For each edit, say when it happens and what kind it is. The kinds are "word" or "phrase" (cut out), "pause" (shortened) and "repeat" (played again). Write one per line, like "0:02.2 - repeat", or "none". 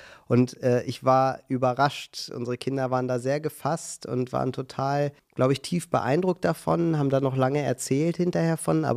0:05.2 - pause

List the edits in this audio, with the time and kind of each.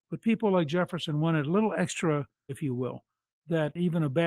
0:02.5 - word

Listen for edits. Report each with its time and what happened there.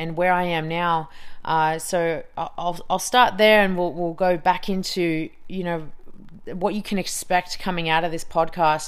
none

